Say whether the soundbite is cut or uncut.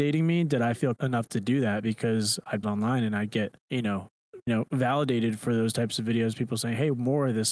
cut